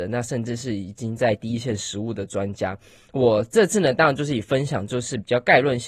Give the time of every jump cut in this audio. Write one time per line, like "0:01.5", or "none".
none